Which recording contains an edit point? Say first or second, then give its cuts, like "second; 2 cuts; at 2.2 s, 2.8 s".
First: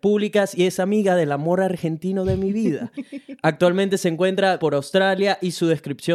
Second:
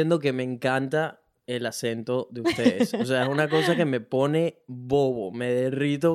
first; 1 cut; at 4.6 s